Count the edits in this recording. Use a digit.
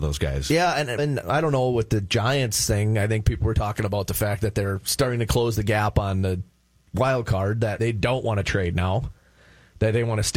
2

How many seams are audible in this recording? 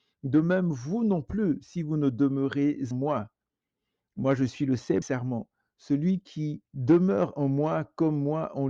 3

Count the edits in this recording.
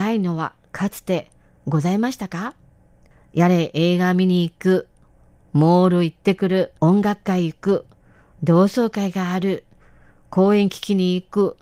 1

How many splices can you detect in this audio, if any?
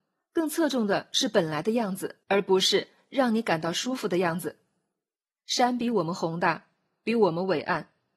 2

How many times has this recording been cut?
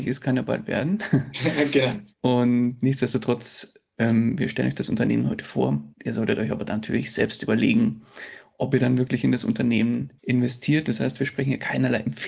3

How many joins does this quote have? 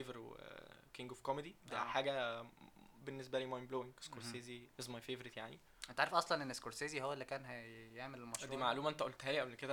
1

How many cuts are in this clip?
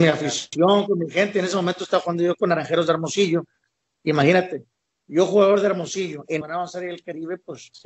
1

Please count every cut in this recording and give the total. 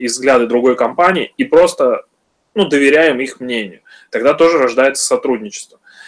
0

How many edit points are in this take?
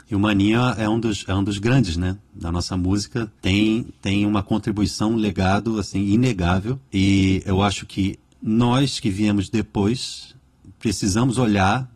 2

